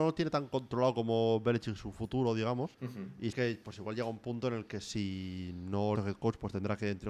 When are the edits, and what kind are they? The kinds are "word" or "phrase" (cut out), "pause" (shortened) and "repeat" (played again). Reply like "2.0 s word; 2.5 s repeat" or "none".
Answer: 2.7 s pause; 3.3 s word; 6.0 s phrase